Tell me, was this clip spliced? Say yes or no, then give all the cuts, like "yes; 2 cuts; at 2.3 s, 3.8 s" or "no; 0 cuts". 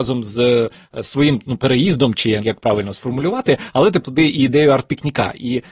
yes; 2 cuts; at 2.4 s, 4.0 s